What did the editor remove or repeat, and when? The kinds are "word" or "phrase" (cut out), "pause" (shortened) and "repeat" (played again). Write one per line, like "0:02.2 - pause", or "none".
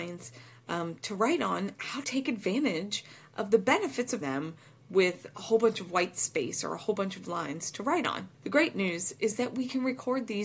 0:02.0 - word
0:04.2 - phrase
0:08.3 - pause